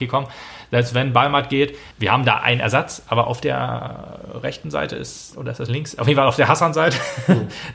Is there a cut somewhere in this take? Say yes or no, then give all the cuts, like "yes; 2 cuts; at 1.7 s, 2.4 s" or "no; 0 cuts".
yes; 1 cut; at 1.9 s